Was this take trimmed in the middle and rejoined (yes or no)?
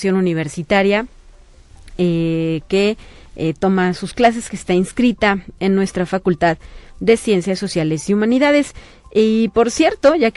no